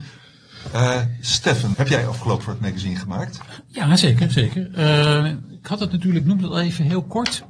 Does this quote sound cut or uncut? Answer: cut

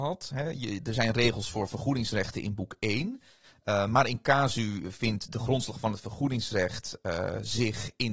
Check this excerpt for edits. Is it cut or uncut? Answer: uncut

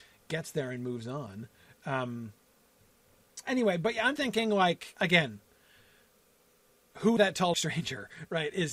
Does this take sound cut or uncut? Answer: cut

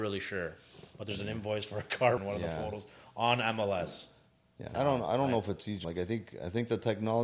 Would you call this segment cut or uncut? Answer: cut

